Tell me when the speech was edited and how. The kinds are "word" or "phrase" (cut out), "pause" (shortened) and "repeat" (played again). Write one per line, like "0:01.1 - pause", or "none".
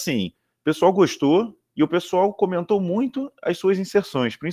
none